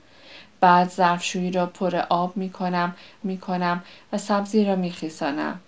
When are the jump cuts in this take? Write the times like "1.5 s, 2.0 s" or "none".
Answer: 3.2 s